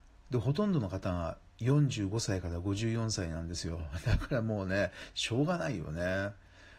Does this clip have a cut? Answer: no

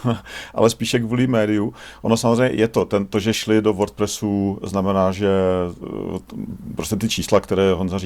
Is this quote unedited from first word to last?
yes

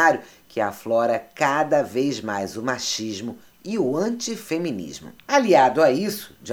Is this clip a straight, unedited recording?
no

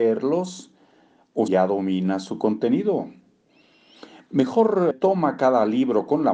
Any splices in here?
yes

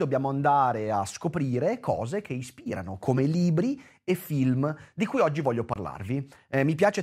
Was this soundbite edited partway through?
no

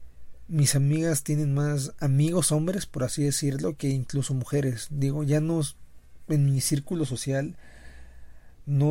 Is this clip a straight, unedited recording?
yes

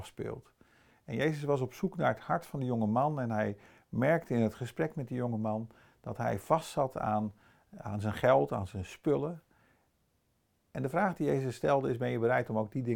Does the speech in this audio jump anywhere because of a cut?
no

